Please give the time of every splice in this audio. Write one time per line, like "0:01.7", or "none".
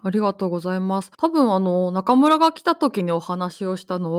0:01.1